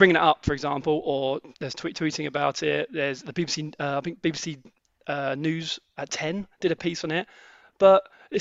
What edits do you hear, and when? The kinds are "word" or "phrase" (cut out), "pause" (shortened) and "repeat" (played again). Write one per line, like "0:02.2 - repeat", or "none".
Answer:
0:01.5 - pause